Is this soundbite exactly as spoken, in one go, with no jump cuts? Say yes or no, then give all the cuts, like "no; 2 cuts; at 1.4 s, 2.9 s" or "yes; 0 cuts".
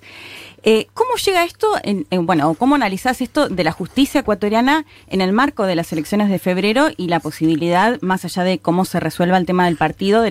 yes; 0 cuts